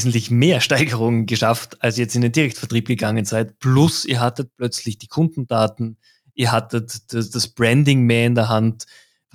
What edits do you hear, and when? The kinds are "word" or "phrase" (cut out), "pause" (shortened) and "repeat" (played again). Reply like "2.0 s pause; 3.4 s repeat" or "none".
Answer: none